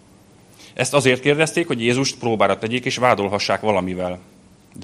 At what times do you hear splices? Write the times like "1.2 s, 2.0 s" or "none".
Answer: none